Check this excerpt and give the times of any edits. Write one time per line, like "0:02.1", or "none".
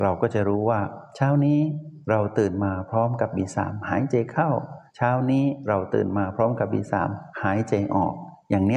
0:04.9
0:07.3

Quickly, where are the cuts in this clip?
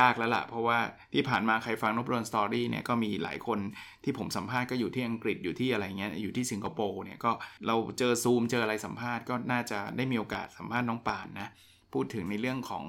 0:07.6

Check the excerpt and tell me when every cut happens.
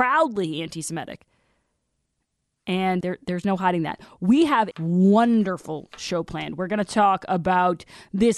0:03.0
0:04.7

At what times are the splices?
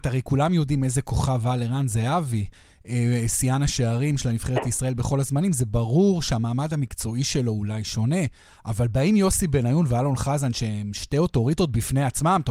none

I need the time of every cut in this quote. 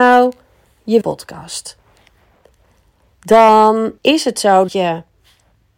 0:01.0
0:04.0
0:04.7

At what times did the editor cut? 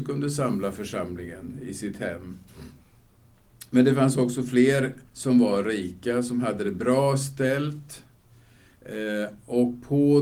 0:05.1

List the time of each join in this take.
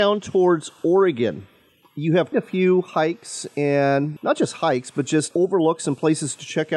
0:02.3
0:04.2
0:05.3

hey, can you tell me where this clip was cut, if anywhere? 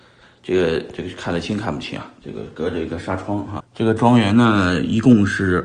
0:02.2
0:03.6

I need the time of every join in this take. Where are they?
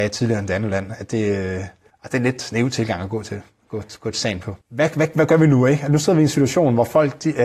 0:01.9
0:04.6

